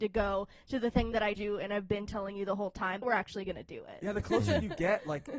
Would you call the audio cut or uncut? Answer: cut